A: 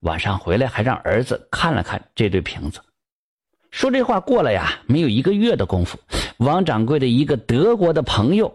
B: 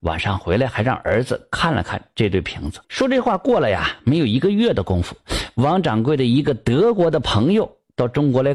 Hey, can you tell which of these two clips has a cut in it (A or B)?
B